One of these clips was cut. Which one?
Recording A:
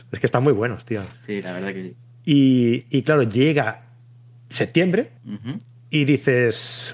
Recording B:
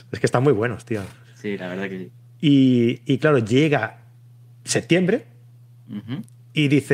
A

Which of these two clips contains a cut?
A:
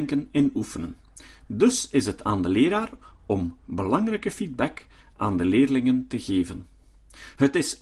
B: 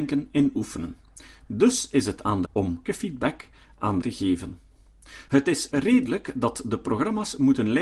B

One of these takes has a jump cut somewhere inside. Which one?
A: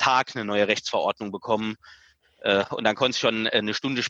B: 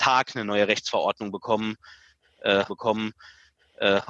B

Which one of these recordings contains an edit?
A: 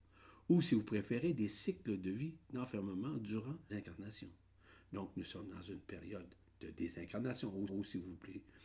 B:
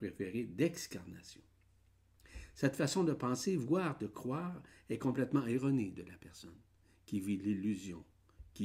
A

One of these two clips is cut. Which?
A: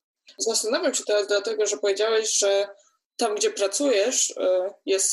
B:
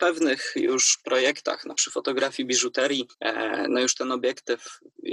B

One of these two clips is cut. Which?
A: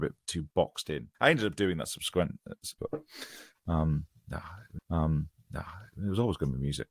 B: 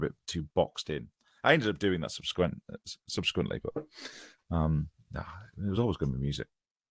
A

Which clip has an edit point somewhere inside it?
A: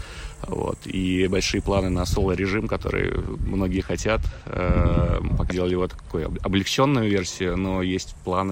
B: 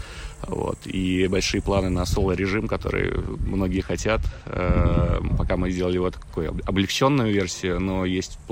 A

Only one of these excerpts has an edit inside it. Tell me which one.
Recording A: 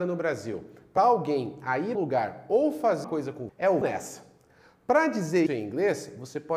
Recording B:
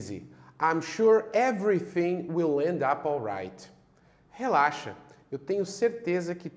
A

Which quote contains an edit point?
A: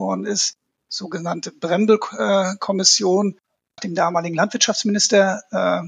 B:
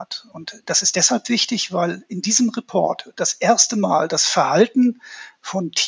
A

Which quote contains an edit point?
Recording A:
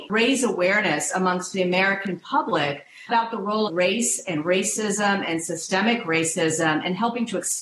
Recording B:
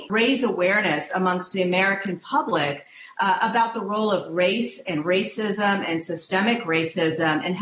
A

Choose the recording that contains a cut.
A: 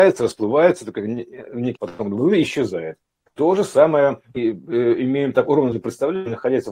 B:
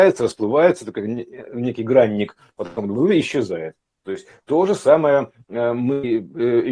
A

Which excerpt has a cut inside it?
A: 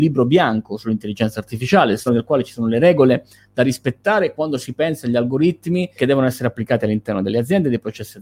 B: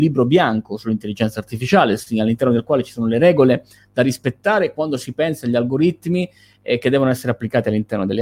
A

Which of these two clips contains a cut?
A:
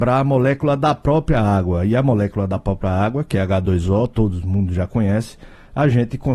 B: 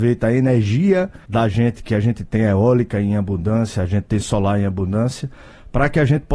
B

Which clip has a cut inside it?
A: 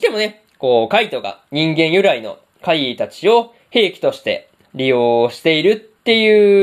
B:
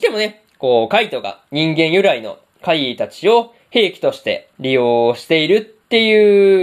B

